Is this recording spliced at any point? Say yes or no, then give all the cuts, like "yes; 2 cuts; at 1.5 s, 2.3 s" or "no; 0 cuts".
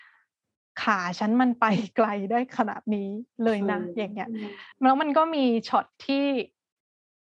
yes; 1 cut; at 4.7 s